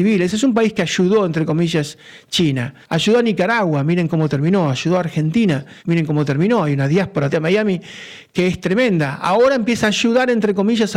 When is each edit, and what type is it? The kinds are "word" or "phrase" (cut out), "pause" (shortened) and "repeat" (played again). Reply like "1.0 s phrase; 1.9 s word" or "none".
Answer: 2.8 s pause; 5.8 s pause; 7.3 s phrase